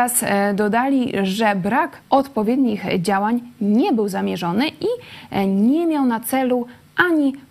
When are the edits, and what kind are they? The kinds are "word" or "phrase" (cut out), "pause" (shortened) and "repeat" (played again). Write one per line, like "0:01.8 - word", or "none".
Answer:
0:02.0 - pause